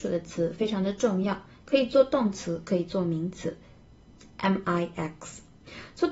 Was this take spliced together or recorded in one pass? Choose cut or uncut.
uncut